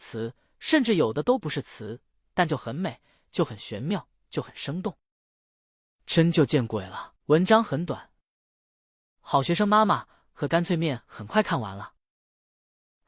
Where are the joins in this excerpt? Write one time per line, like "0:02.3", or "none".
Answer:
none